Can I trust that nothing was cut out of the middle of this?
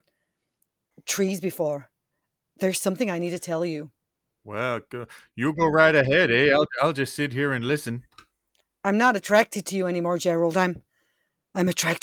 yes; 0 cuts

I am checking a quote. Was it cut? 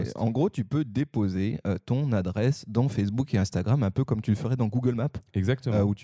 no; 0 cuts

